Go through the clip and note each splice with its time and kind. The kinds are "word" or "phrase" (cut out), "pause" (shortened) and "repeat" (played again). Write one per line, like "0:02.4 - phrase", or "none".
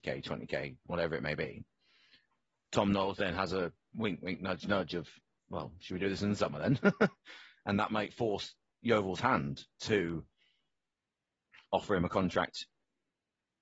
none